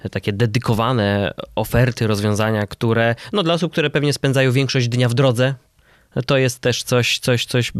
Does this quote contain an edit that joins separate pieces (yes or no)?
no